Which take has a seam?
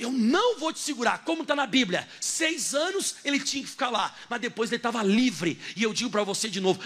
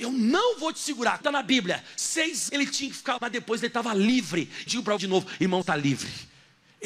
second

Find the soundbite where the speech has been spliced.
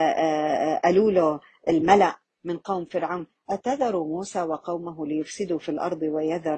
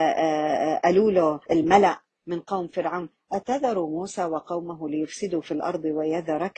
second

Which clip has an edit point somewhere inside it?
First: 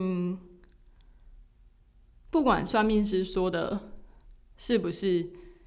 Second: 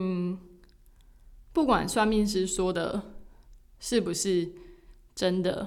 second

